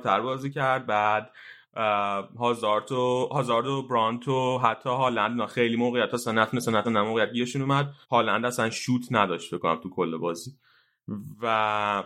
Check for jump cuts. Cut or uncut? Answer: cut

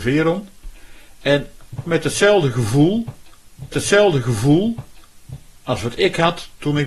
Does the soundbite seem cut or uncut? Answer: cut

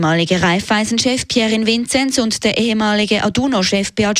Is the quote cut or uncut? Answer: uncut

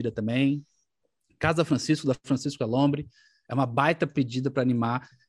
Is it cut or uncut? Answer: uncut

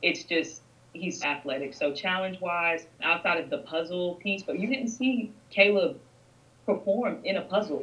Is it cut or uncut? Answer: cut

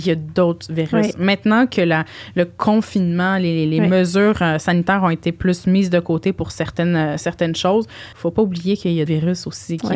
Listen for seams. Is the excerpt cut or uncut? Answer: cut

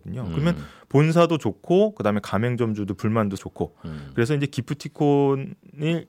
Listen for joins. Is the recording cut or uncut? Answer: cut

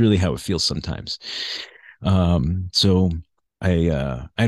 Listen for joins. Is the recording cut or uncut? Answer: cut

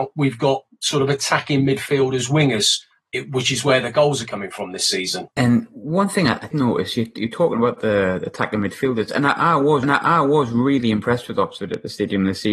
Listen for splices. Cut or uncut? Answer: cut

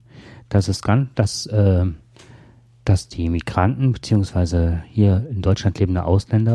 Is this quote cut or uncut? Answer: uncut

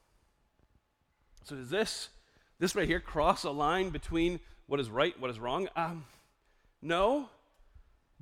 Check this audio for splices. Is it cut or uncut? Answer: uncut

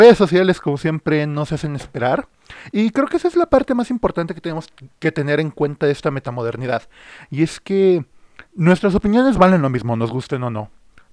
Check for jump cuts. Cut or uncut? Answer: cut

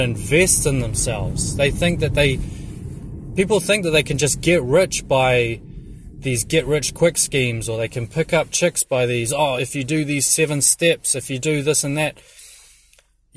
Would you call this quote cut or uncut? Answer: cut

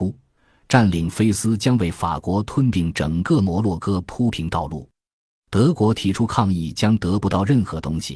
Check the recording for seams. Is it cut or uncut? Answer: uncut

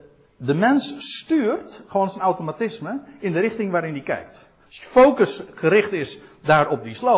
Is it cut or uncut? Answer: uncut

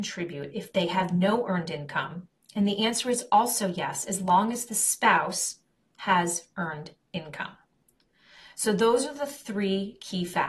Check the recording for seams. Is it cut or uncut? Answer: uncut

